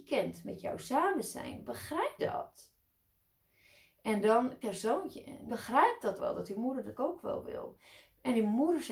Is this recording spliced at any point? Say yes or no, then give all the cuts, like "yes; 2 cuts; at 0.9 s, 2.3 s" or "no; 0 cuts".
yes; 5 cuts; at 2.2 s, 4.6 s, 5.5 s, 6.2 s, 6.9 s